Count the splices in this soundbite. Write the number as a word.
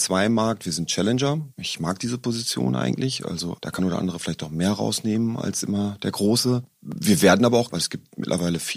three